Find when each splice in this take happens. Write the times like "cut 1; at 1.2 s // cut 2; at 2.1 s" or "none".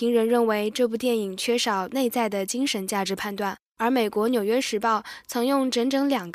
cut 1; at 3.7 s